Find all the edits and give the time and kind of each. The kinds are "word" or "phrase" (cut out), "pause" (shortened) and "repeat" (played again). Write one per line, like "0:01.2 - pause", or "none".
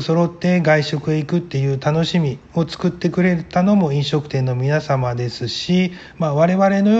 0:02.5 - pause